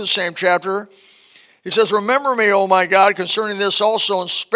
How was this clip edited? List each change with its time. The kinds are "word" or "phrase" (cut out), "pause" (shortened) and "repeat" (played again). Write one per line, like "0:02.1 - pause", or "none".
none